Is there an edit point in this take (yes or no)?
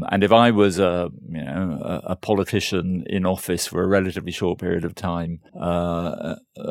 yes